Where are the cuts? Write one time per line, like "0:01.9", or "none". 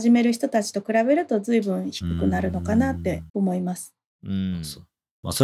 0:03.3